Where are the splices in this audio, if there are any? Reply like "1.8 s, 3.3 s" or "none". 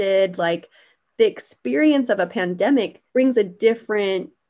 3.1 s